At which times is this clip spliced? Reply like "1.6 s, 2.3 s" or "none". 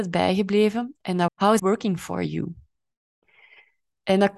1.3 s, 1.6 s